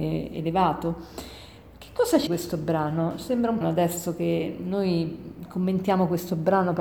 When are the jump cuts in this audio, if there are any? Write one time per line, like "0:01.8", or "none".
0:02.3
0:03.6